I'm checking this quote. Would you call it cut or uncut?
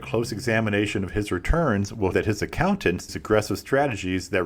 cut